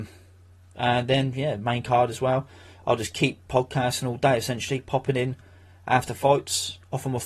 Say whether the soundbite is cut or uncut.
uncut